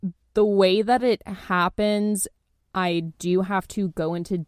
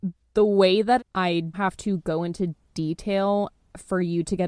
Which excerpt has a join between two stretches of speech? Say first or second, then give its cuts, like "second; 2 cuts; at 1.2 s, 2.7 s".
second; 2 cuts; at 1.0 s, 1.5 s